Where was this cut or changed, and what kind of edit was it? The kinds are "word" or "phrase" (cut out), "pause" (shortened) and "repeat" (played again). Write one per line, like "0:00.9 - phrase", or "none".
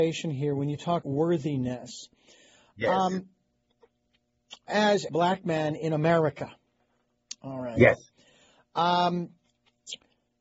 0:01.0 - word
0:04.7 - word
0:05.1 - word

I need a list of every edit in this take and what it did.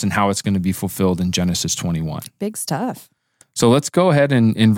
none

